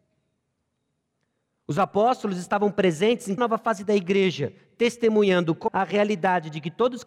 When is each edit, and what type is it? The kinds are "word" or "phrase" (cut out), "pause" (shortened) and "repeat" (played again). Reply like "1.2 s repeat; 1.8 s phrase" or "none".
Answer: 3.4 s word; 5.7 s word